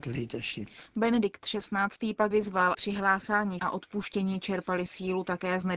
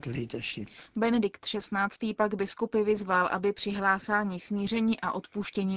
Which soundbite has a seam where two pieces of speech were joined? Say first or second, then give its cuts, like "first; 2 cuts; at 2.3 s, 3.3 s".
first; 3 cuts; at 2.3 s, 2.7 s, 3.6 s